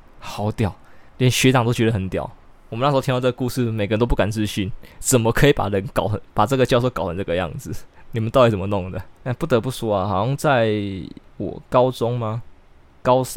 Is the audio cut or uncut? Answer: cut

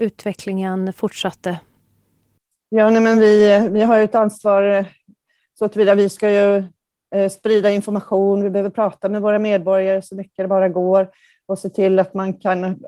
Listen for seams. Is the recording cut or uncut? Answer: uncut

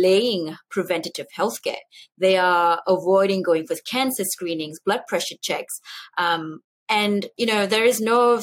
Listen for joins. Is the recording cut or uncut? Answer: uncut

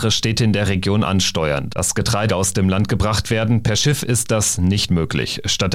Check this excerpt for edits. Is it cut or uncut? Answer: cut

